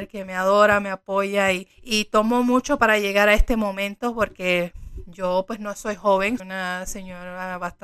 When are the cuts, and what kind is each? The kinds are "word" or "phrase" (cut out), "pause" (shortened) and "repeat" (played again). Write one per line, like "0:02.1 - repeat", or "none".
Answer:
0:01.7 - pause
0:06.4 - word

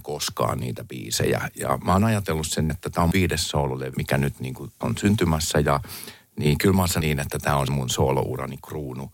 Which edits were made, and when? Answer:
0:02.7 - word
0:03.1 - word
0:03.9 - word
0:04.8 - word
0:07.0 - word
0:07.7 - word

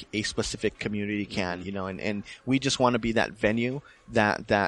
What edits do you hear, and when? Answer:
none

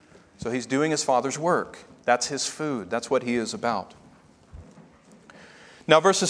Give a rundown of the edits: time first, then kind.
none

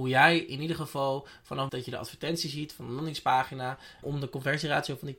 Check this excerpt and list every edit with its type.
0:01.7 - word
0:04.0 - word

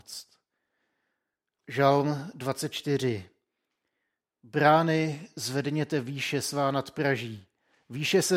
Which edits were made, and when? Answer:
none

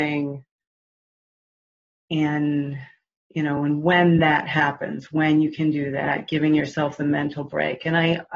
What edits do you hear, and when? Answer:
none

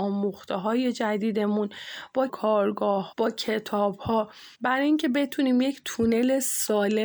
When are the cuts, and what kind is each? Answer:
0:02.3 - phrase
0:03.1 - word
0:04.5 - pause

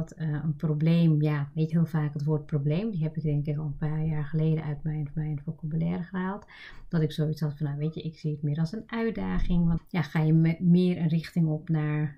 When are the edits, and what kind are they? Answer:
0:01.7 - phrase
0:05.1 - repeat
0:09.8 - word

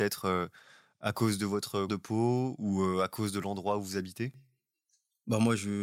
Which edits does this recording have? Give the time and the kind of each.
0:01.9 - word

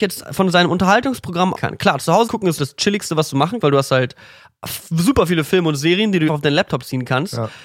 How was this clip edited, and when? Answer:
0:01.5 - word
0:02.3 - word
0:02.6 - word
0:03.6 - word
0:06.3 - word

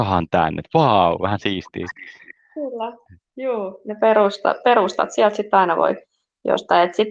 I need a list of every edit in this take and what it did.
none

